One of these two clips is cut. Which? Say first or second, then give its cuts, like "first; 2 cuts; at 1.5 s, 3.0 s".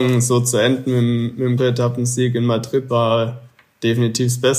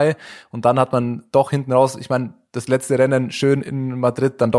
first; 2 cuts; at 1.6 s, 2.9 s